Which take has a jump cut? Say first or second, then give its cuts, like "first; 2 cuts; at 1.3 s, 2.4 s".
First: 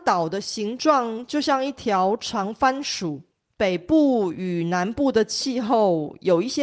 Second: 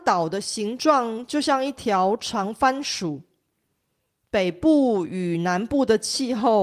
first; 1 cut; at 3.3 s